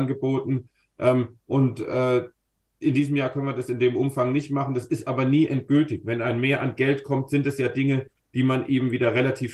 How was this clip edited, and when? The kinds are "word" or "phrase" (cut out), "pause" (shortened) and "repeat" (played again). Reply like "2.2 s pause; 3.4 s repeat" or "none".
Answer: none